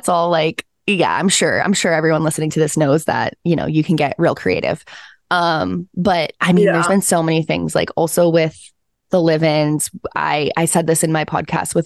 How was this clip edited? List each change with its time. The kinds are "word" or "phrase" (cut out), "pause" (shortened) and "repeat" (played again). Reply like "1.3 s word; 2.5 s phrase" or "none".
none

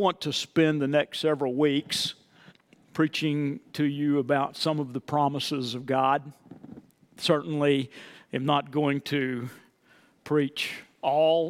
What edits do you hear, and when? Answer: 2.5 s pause

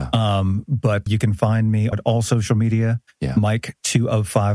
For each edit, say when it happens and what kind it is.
1.1 s word; 1.9 s word

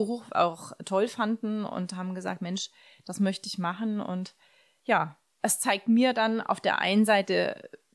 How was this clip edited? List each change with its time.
none

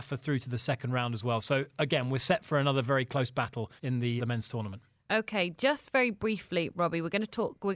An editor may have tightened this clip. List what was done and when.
3.8 s pause; 4.2 s word

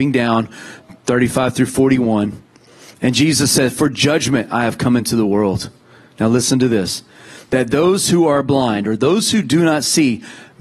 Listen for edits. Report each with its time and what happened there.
none

